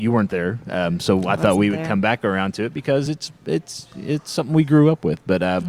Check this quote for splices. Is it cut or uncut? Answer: uncut